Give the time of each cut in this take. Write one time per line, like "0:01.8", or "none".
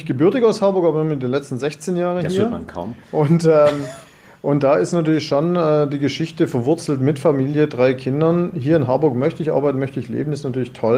none